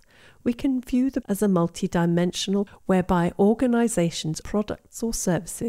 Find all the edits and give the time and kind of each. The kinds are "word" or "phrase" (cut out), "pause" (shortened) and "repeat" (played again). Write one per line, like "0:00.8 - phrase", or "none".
0:01.2 - word
0:02.7 - word
0:04.4 - word